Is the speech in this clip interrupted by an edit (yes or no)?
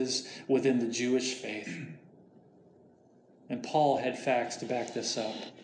no